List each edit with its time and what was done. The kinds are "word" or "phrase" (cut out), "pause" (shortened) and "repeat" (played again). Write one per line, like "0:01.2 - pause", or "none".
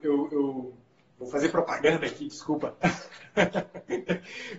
none